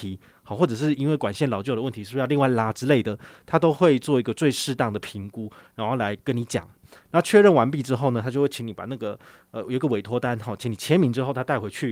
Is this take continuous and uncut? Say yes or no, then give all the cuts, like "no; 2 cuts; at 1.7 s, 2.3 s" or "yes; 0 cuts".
yes; 0 cuts